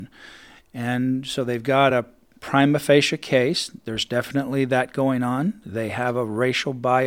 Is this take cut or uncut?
uncut